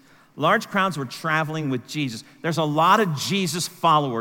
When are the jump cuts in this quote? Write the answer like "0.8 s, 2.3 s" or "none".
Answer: none